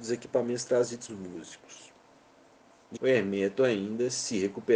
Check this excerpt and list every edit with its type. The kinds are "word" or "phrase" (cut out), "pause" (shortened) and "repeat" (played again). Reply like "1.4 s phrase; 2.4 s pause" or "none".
1.1 s word; 3.0 s word